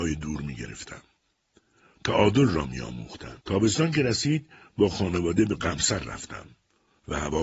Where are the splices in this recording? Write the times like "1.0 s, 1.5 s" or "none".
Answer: 3.4 s